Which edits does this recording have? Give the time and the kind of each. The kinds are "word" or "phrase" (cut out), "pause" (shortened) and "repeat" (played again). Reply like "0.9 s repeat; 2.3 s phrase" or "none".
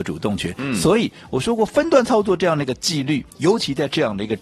none